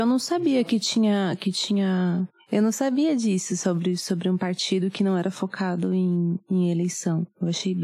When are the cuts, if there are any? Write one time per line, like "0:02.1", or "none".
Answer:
none